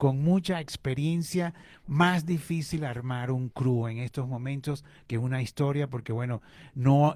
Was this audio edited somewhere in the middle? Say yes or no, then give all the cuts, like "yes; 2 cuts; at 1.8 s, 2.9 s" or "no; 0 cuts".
no; 0 cuts